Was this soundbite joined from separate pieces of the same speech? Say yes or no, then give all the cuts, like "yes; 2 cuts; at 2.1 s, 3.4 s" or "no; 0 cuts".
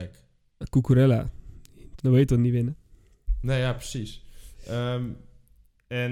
yes; 1 cut; at 2.0 s